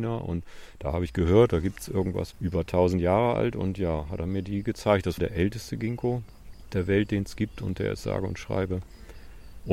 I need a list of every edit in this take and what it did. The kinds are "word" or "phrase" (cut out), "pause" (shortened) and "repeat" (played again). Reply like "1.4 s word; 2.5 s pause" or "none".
2.3 s word; 6.7 s word